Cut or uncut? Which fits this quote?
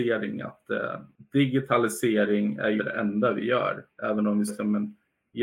cut